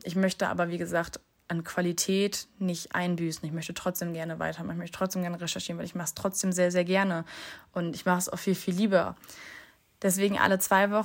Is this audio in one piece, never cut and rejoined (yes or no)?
yes